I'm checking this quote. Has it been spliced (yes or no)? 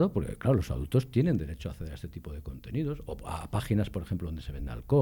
no